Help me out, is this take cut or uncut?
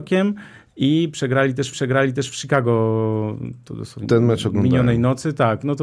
cut